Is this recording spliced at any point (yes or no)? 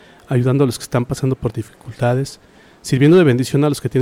no